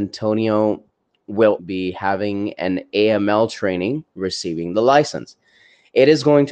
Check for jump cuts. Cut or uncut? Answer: cut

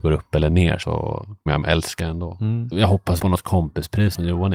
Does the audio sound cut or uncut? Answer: cut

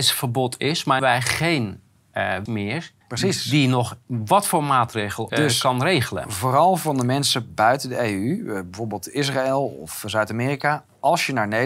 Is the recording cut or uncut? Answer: cut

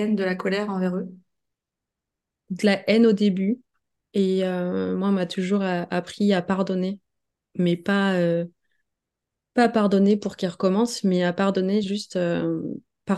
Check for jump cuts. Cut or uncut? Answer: uncut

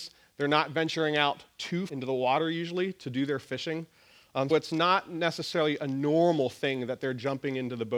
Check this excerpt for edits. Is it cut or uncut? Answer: cut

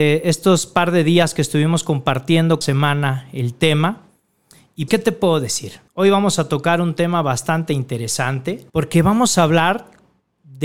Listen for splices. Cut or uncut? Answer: cut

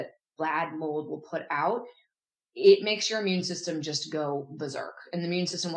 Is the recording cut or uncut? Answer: uncut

